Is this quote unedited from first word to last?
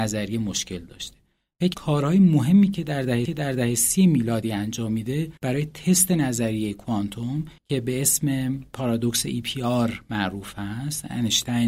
no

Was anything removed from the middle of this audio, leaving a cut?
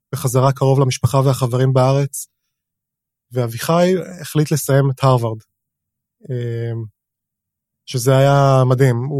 no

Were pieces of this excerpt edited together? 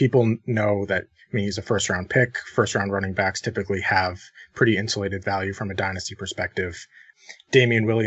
no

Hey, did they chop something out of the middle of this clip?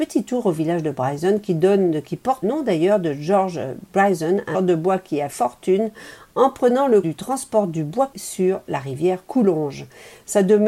yes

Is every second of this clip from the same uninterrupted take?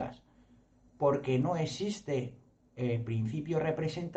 yes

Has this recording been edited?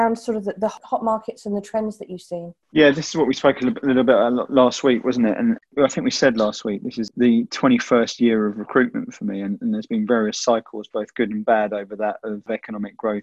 yes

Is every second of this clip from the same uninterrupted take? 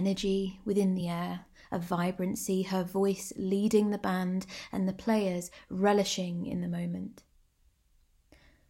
yes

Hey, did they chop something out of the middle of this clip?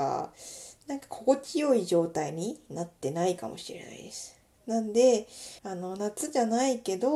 yes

